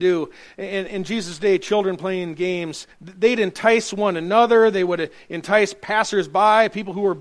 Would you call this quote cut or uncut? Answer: cut